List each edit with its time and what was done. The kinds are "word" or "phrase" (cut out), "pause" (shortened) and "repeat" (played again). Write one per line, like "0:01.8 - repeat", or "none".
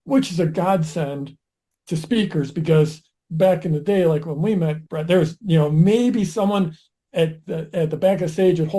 0:04.9 - pause